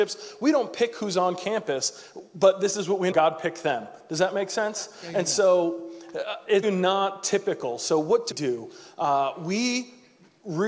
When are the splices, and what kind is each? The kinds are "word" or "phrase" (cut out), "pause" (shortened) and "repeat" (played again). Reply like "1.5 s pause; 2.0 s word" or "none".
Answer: 3.1 s word; 6.6 s word; 8.3 s word

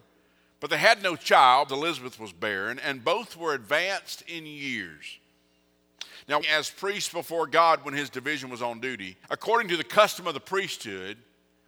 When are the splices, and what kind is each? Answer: 1.7 s word; 6.4 s phrase; 9.2 s pause

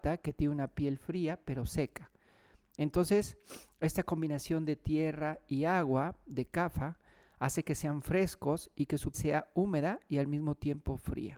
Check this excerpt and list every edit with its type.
9.1 s word

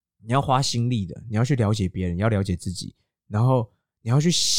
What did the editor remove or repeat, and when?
none

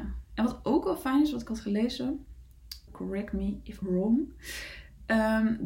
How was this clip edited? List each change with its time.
2.9 s word; 3.8 s word

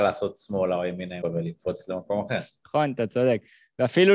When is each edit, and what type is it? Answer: 1.2 s word

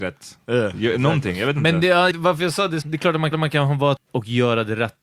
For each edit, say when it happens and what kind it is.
2.1 s word; 2.8 s word; 3.3 s repeat; 4.0 s word

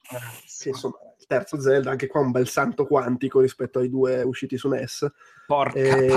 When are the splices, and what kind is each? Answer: none

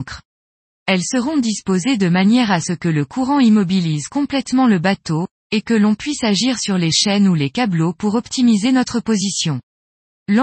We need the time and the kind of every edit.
none

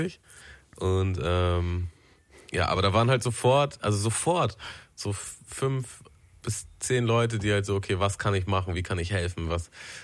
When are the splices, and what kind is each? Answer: none

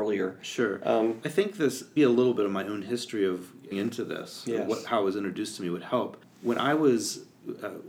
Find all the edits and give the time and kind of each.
1.2 s word; 2.0 s word; 3.7 s word

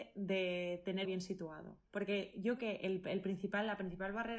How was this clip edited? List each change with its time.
1.0 s phrase; 1.9 s pause; 2.6 s word

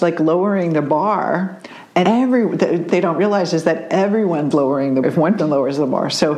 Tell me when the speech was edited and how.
2.0 s word; 2.9 s word; 4.5 s word; 5.0 s word; 5.4 s word

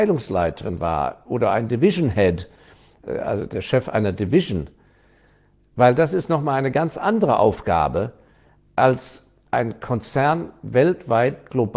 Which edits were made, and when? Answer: none

